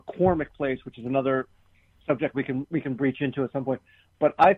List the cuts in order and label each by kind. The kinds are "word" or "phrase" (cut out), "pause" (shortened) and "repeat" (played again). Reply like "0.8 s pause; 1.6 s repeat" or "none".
none